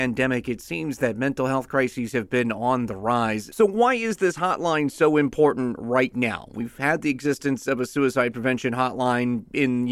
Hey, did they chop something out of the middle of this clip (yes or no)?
no